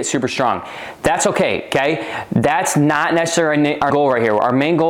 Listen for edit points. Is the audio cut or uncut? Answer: cut